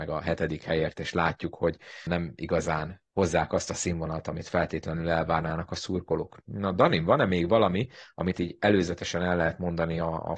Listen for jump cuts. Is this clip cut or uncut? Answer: cut